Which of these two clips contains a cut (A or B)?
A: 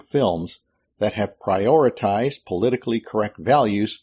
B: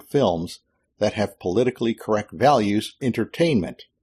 B